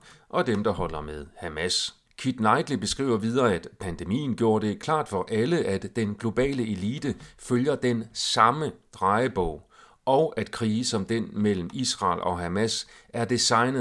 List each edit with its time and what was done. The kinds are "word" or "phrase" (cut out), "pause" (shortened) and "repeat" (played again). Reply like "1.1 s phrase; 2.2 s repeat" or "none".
2.1 s pause